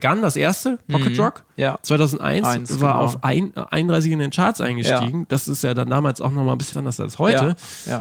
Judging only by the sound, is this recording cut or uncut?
cut